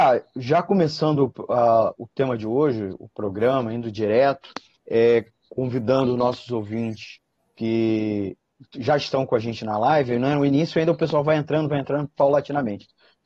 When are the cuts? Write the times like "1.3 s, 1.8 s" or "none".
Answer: 4.7 s, 7.4 s